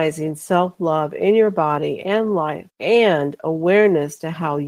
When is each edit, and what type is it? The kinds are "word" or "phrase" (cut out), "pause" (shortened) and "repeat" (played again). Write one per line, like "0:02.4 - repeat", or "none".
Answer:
0:02.7 - pause